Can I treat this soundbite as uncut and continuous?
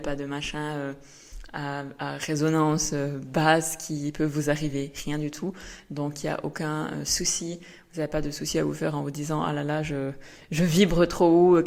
yes; 0 cuts

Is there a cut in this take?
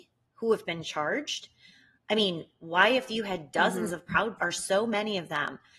yes; 1 cut; at 4.4 s

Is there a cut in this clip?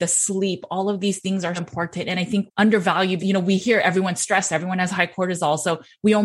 yes; 3 cuts; at 1.6 s, 2.5 s, 3.2 s

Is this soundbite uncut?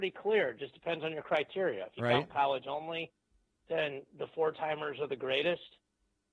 yes; 0 cuts

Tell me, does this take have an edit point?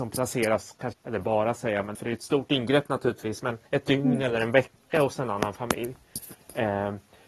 yes; 3 cuts; at 0.9 s, 1.9 s, 3.6 s

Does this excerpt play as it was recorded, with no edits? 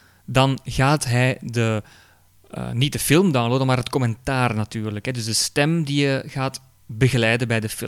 yes; 0 cuts

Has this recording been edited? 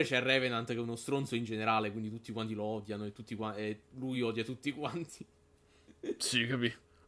no; 0 cuts

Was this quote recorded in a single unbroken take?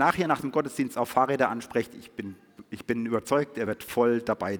yes; 0 cuts

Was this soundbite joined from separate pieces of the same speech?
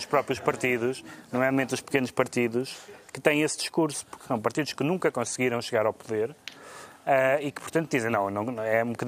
no; 0 cuts

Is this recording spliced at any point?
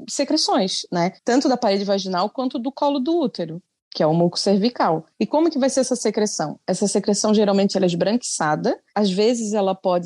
no; 0 cuts

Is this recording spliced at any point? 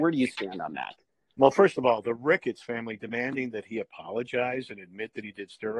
no; 0 cuts

